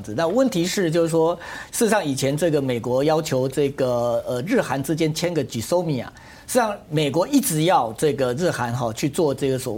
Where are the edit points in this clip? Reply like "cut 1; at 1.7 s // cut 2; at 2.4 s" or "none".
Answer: none